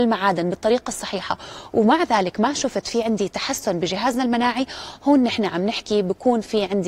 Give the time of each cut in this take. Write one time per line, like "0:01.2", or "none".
none